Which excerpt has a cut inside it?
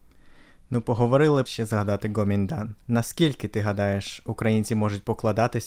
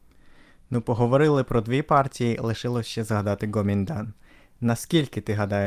first; 2 cuts; at 1.5 s, 2.8 s

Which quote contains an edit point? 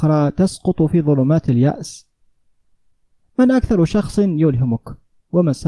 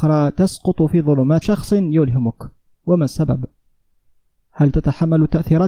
second; 1 cut; at 1.4 s

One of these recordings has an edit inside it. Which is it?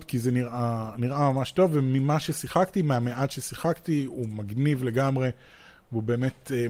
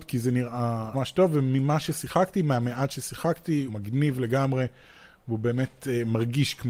second; 2 cuts; at 0.9 s, 3.7 s

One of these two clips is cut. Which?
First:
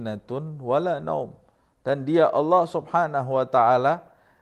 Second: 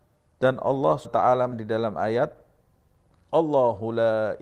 second; 2 cuts; at 1.0 s, 1.5 s

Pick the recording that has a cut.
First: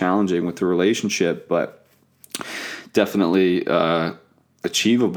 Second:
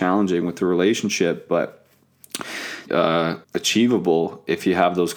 second; 2 cuts; at 2.9 s, 3.4 s

